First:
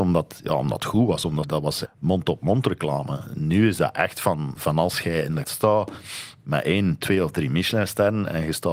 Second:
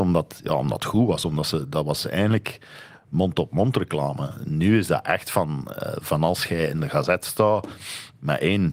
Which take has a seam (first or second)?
first